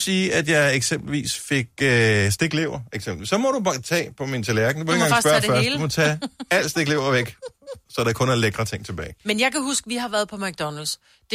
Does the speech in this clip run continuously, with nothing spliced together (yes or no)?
no